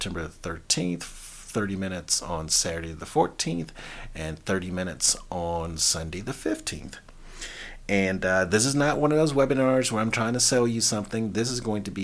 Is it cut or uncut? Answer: uncut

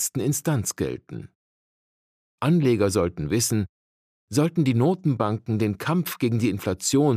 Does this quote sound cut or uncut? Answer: uncut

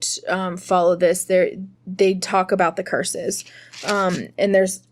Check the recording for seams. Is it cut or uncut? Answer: cut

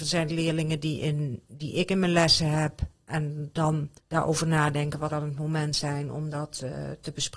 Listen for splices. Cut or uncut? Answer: cut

